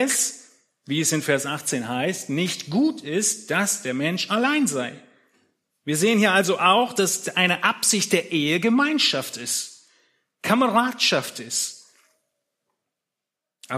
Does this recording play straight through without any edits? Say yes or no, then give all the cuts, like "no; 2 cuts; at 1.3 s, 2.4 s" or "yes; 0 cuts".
yes; 0 cuts